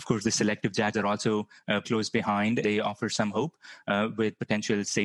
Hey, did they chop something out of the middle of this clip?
yes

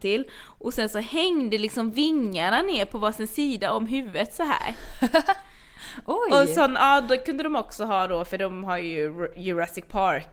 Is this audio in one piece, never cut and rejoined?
yes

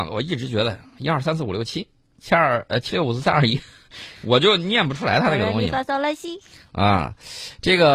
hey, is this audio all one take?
yes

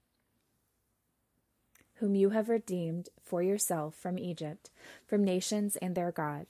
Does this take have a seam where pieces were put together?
no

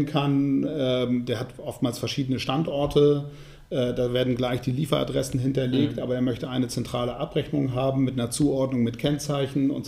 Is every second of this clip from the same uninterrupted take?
yes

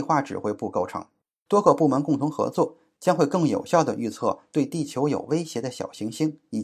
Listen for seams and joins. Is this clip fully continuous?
yes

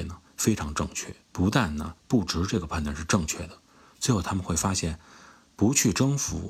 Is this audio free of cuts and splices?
no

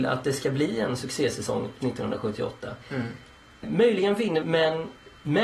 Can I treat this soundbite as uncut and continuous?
no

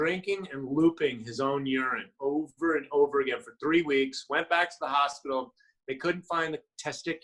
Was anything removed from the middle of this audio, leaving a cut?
no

